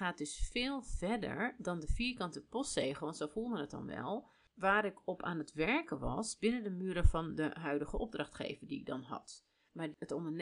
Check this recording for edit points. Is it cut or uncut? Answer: uncut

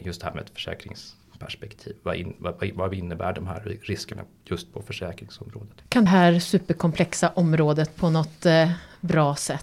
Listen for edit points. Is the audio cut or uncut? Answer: cut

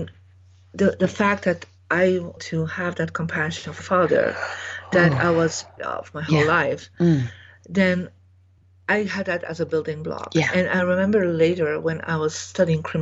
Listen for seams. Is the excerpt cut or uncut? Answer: cut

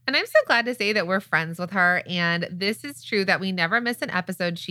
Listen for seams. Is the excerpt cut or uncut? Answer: uncut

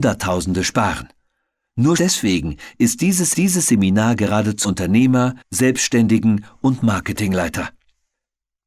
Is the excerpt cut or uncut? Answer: cut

